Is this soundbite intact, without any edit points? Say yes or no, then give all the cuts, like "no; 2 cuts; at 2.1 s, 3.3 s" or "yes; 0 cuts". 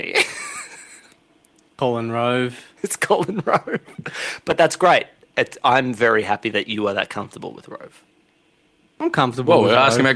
yes; 0 cuts